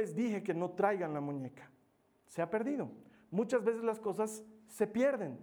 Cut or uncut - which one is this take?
uncut